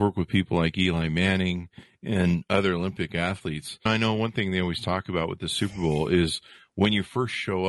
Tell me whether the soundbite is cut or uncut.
uncut